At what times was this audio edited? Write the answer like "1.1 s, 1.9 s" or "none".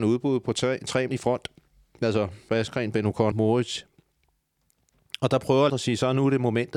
1.1 s, 2.5 s, 3.3 s, 5.7 s